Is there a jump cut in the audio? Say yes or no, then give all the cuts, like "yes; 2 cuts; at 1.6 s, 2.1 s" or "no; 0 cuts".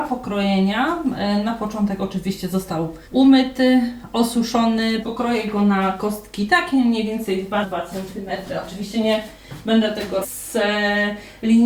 yes; 4 cuts; at 3.0 s, 5.0 s, 7.6 s, 10.2 s